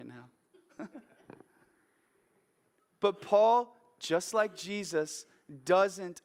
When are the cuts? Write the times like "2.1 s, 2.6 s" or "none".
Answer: 1.6 s

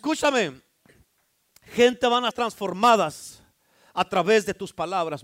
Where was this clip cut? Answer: 2.3 s

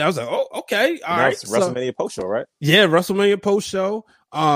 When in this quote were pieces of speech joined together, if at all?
2.5 s

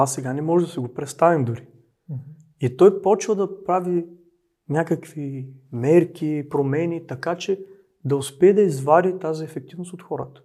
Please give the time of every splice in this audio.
none

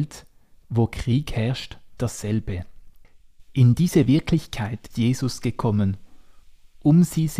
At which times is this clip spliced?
2.0 s, 4.9 s

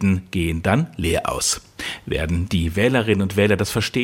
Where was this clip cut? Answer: none

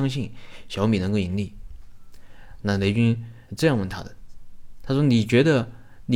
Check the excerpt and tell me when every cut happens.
3.5 s

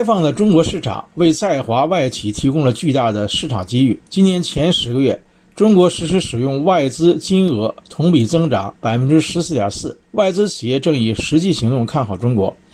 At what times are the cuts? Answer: 4.1 s, 8.8 s, 10.0 s

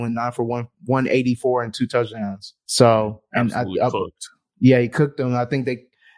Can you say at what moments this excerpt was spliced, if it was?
none

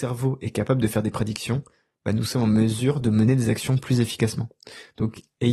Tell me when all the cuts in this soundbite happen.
none

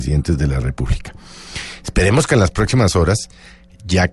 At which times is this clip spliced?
none

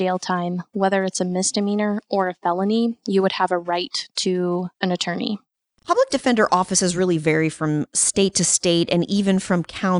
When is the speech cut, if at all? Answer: 4.7 s, 5.5 s

